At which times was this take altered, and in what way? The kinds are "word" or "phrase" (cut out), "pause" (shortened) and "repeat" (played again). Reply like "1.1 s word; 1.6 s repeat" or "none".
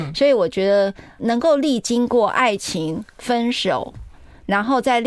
1.2 s word